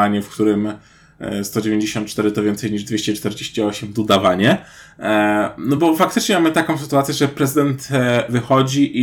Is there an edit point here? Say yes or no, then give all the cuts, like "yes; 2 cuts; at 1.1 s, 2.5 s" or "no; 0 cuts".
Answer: no; 0 cuts